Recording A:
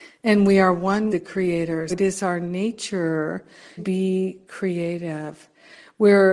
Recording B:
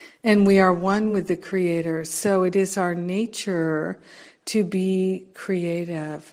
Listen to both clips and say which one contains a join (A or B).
A